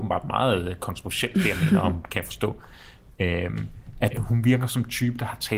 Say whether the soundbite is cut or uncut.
cut